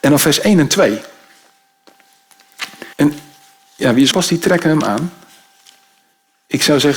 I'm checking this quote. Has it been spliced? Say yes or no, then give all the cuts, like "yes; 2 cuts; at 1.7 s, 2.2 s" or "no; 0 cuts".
yes; 2 cuts; at 2.9 s, 4.1 s